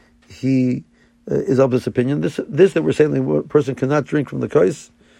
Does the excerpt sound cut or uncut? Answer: cut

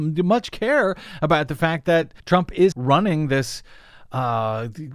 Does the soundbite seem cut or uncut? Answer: cut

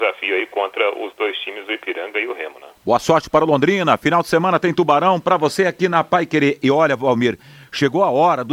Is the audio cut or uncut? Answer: cut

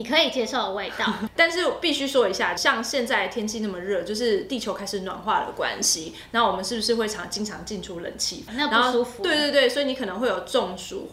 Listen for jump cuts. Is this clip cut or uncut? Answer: cut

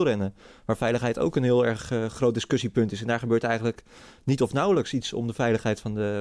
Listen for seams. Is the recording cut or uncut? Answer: uncut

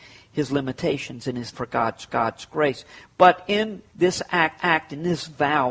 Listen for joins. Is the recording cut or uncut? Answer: cut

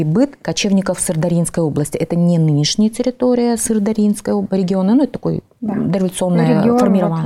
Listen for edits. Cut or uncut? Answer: uncut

